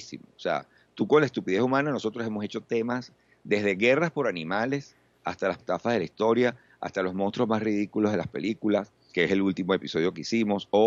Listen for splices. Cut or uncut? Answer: cut